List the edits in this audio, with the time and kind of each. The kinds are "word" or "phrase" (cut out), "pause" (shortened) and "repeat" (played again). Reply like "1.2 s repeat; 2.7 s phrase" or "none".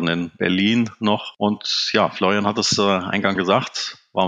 3.4 s word